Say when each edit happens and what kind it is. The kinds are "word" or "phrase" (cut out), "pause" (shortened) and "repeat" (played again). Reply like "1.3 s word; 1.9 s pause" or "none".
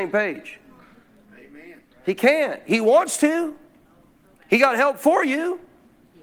none